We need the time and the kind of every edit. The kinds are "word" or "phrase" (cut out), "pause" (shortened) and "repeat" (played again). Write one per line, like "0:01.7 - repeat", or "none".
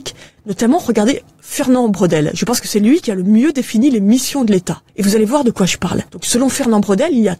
0:06.1 - pause